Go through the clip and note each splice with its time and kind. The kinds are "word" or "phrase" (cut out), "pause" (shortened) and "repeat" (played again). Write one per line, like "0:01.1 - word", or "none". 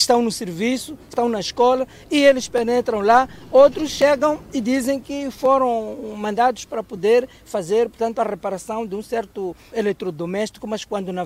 0:01.1 - phrase
0:09.7 - word